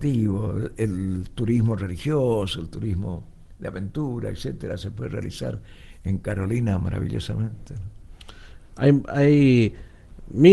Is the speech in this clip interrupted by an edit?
no; 0 cuts

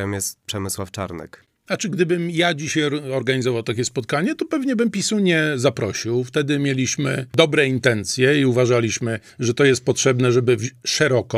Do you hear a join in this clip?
no; 0 cuts

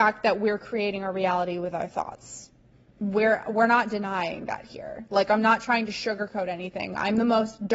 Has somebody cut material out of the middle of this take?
no; 0 cuts

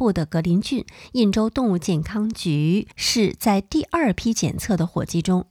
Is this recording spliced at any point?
yes; 1 cut; at 2.9 s

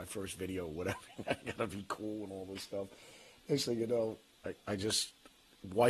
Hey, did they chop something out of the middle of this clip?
no; 0 cuts

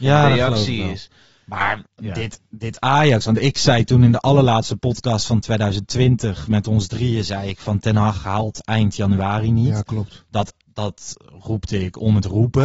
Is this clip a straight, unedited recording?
no; 2 cuts; at 1.9 s, 10.7 s

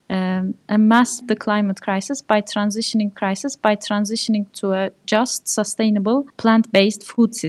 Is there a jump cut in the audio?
yes; 3 cuts; at 1.2 s, 3.1 s, 6.3 s

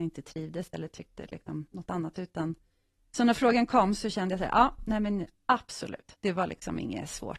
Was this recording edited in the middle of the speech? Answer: no; 0 cuts

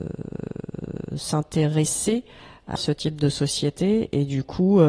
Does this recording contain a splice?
yes; 1 cut; at 2.8 s

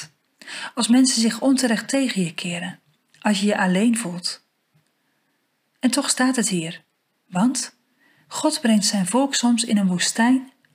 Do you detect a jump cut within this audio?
no; 0 cuts

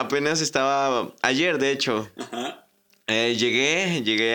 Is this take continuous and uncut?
yes; 0 cuts

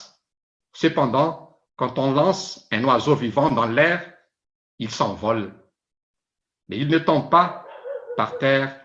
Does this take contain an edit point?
yes; 1 cut; at 1.7 s

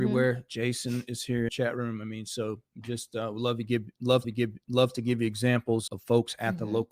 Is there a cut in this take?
yes; 4 cuts; at 1.5 s, 2.7 s, 4.2 s, 5.9 s

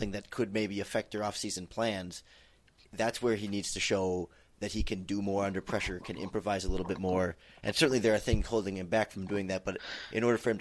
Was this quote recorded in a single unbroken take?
yes; 0 cuts

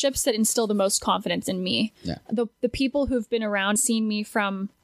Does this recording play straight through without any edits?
no; 1 cut; at 3.8 s

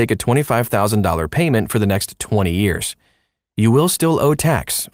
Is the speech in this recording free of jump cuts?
yes; 0 cuts

